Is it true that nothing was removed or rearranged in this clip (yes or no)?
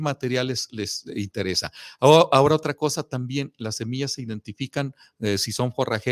yes